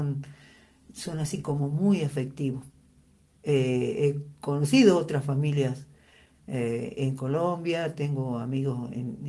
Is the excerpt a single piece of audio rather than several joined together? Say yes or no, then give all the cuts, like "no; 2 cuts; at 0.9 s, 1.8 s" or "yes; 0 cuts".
yes; 0 cuts